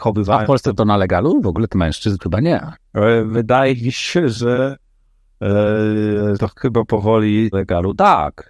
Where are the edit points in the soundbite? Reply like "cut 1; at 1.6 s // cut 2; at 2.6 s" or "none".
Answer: cut 1; at 1.7 s // cut 2; at 2.2 s // cut 3; at 6.3 s // cut 4; at 7.5 s

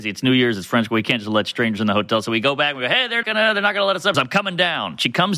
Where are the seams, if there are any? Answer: cut 1; at 3.2 s // cut 2; at 4.1 s

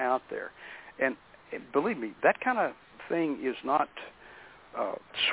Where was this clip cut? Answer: cut 1; at 2.2 s

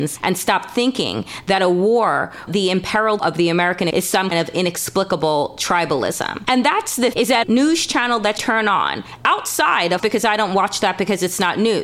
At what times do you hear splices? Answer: cut 1; at 2.5 s // cut 2; at 3.2 s // cut 3; at 3.9 s // cut 4; at 4.3 s // cut 5; at 7.1 s // cut 6; at 7.4 s // cut 7; at 8.4 s // cut 8; at 10.0 s

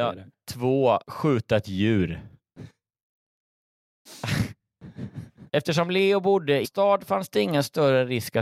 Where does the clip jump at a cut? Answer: cut 1; at 1.0 s // cut 2; at 5.5 s // cut 3; at 6.6 s

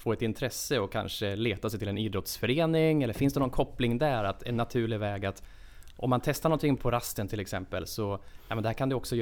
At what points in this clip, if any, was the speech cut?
cut 1; at 6.8 s

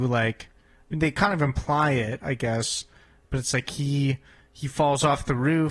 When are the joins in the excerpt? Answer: none

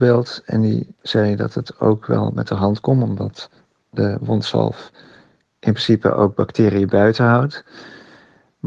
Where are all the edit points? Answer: none

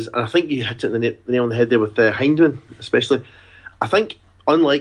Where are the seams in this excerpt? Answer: none

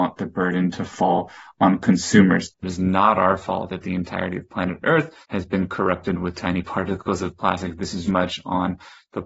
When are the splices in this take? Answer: cut 1; at 5.2 s // cut 2; at 8.1 s

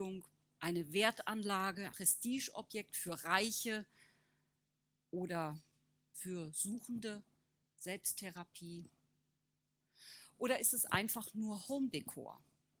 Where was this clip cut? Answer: cut 1; at 1.9 s // cut 2; at 6.1 s

